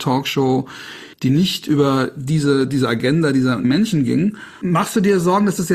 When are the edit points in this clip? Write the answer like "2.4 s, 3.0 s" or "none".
1.1 s